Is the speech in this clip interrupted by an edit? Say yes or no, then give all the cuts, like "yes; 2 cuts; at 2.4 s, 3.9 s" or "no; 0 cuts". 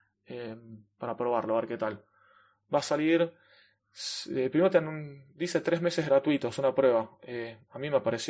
no; 0 cuts